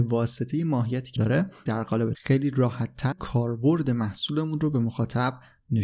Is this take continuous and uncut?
no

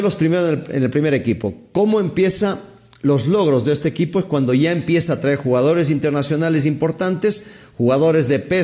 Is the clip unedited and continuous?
yes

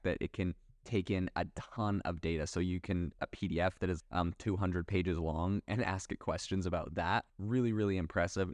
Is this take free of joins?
no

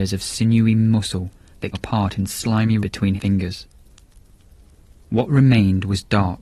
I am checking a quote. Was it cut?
yes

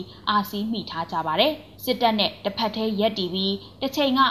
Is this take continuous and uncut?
no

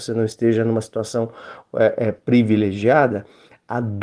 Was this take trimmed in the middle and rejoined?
no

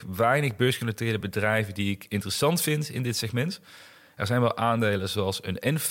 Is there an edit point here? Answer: no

